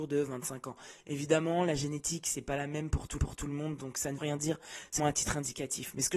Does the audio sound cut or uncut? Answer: cut